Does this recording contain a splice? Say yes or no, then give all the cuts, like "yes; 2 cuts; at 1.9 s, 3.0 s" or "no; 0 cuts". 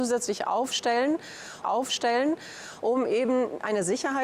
yes; 1 cut; at 1.6 s